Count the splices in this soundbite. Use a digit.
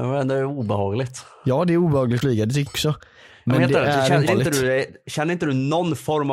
3